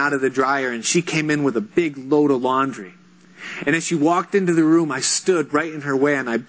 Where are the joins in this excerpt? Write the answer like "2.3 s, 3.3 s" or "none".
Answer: none